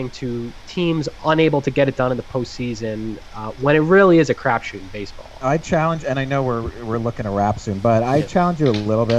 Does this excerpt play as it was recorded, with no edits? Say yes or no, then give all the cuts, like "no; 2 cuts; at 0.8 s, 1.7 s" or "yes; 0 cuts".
yes; 0 cuts